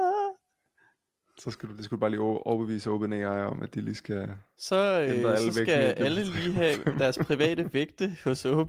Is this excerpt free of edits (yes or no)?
yes